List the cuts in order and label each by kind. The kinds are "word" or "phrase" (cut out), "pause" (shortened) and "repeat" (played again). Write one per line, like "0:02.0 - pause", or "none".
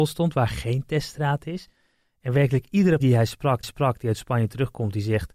0:03.0 - word
0:03.6 - repeat

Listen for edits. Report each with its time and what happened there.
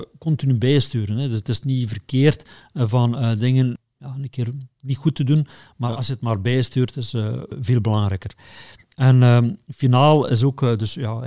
none

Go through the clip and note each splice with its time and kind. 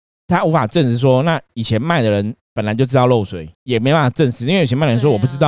0:03.5 - pause

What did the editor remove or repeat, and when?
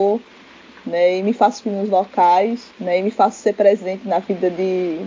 0:01.6 - word

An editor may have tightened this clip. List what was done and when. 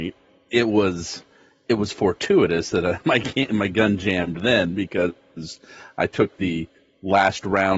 none

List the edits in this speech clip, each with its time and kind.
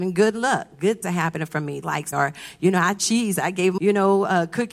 0:01.0 - word
0:01.8 - word
0:02.1 - word
0:03.8 - word

